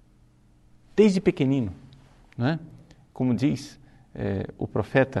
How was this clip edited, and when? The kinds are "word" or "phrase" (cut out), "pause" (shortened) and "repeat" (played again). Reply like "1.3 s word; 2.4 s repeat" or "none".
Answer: none